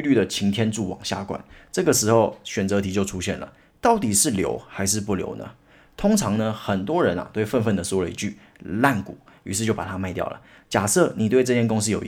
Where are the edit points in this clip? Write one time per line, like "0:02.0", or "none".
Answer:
none

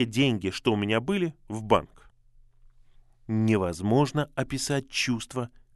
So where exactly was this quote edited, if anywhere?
none

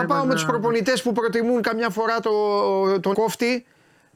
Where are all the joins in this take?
0:03.1

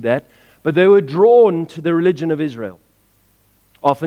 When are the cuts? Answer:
none

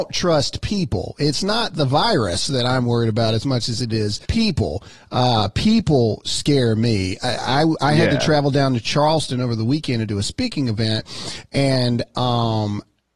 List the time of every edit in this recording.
0:04.2

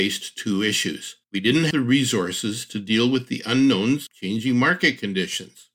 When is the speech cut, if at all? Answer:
0:01.2
0:01.7
0:04.1

